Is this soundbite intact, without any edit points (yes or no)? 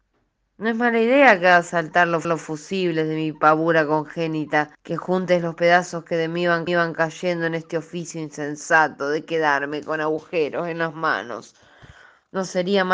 no